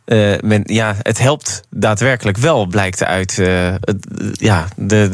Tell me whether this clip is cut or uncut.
uncut